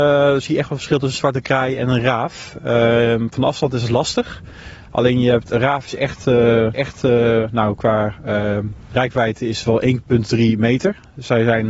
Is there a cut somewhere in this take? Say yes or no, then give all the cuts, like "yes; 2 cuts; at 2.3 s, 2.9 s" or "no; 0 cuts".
yes; 1 cut; at 6.7 s